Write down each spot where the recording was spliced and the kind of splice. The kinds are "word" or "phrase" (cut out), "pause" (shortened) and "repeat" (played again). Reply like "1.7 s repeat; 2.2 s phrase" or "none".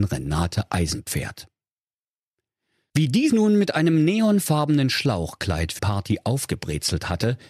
3.3 s word; 5.8 s word